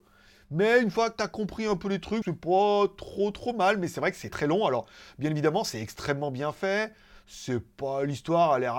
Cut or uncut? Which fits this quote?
cut